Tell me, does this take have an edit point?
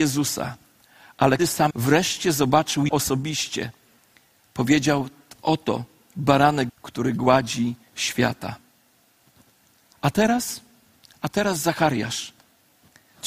yes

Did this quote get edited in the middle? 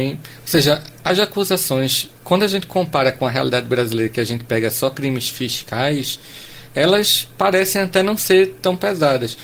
yes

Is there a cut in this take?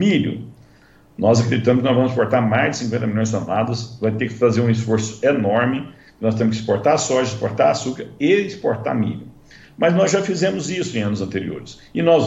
no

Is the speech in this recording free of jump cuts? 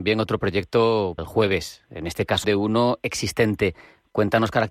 no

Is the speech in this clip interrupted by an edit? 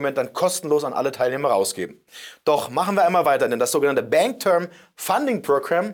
no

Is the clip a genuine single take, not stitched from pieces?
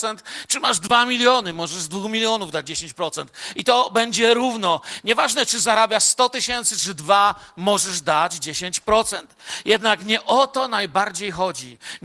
yes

